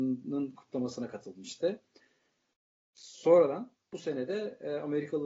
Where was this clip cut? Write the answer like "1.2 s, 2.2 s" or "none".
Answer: none

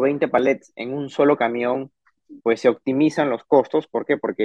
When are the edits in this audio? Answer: 2.4 s

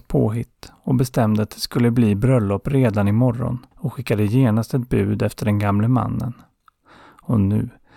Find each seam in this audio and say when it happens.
3.7 s

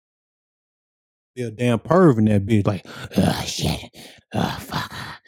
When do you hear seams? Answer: 2.6 s, 4.2 s

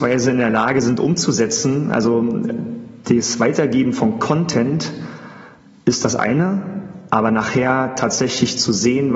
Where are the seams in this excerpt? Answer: none

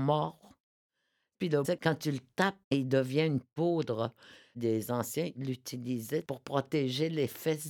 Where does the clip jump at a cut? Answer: 1.6 s, 2.6 s

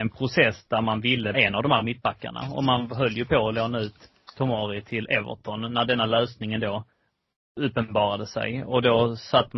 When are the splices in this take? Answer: 1.3 s

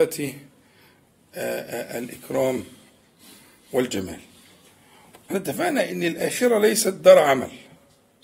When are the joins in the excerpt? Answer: 5.3 s

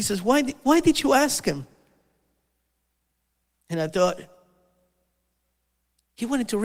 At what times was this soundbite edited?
none

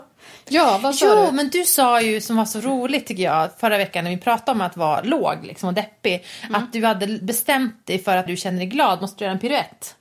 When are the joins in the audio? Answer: 8.3 s

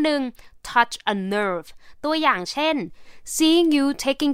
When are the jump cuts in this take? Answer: none

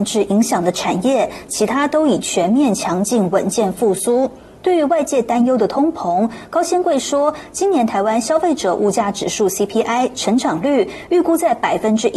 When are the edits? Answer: none

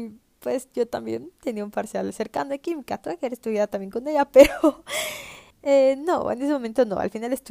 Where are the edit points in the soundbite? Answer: 5.5 s

